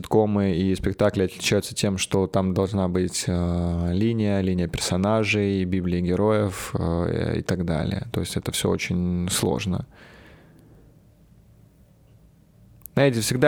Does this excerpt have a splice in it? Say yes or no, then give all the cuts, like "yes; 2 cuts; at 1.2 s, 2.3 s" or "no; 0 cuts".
no; 0 cuts